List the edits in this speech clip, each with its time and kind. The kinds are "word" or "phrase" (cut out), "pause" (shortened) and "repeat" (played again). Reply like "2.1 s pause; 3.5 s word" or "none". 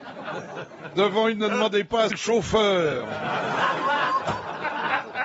1.4 s word; 2.1 s word